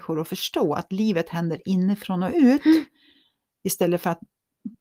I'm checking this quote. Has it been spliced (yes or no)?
no